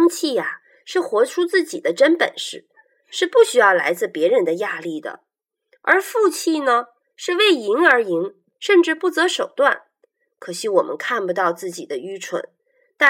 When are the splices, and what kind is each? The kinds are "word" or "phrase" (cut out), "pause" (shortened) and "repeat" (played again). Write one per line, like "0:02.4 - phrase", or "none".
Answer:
none